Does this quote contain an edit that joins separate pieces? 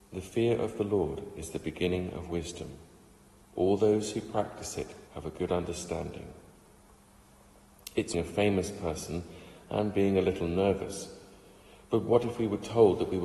yes; 2 cuts; at 5.1 s, 8.1 s

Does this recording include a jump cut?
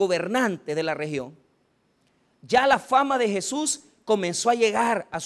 no; 0 cuts

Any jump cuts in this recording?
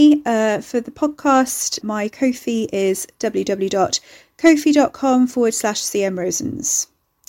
yes; 1 cut; at 1.8 s

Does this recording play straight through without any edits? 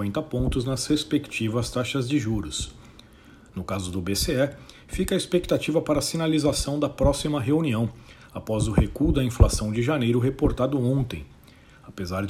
yes; 0 cuts

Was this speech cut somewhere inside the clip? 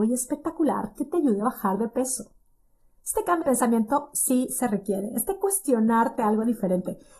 yes; 1 cut; at 3.4 s

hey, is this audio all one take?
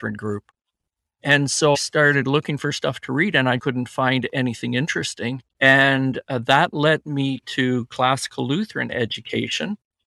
no; 3 cuts; at 1.7 s, 3.6 s, 5.5 s

